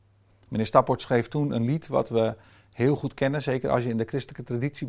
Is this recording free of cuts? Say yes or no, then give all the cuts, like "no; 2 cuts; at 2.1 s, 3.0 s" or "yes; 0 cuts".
yes; 0 cuts